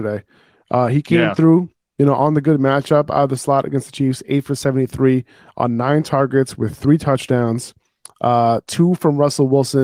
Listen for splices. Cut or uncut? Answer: uncut